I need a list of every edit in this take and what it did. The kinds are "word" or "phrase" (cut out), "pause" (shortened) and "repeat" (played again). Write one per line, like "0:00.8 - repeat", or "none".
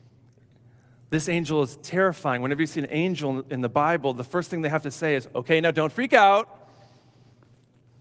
none